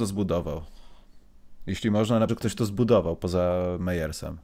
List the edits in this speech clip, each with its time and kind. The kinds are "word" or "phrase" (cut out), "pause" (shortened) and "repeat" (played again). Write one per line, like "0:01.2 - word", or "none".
0:02.3 - word